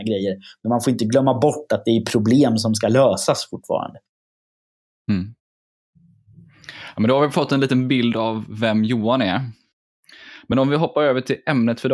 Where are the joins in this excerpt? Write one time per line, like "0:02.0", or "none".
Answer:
none